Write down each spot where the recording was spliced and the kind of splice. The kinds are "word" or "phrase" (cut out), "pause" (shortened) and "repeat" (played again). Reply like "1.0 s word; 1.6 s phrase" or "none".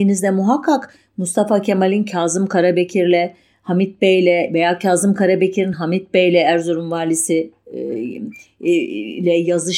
none